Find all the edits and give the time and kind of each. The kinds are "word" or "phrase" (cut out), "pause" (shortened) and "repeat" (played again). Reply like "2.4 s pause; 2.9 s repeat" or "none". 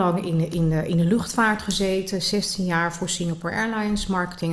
none